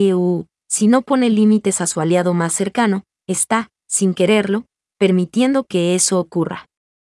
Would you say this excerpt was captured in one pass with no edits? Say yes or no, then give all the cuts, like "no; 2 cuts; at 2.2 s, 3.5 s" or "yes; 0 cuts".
yes; 0 cuts